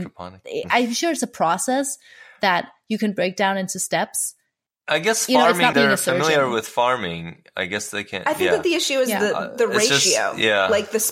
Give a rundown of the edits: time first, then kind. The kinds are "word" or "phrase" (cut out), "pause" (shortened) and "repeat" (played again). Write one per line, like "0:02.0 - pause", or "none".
0:05.7 - word

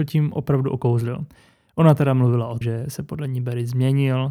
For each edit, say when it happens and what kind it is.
0:02.6 - word

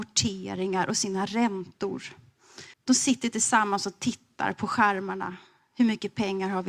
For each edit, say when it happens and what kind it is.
0:02.7 - pause

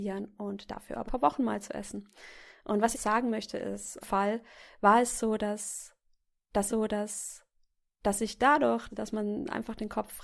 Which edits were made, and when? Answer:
0:01.1 - phrase
0:02.9 - phrase
0:04.0 - phrase
0:06.7 - repeat
0:08.9 - word

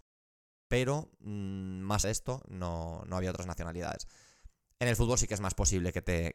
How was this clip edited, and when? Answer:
0:02.0 - word

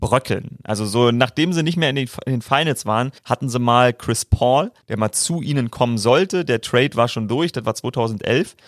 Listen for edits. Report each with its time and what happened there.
0:03.2 - pause
0:04.8 - pause

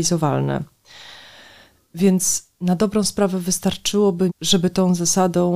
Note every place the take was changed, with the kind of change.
0:04.3 - word

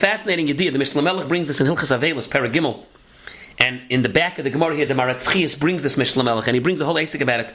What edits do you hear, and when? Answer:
none

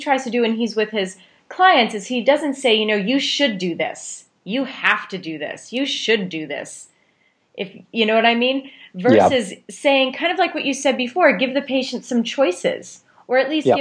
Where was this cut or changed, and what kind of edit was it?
none

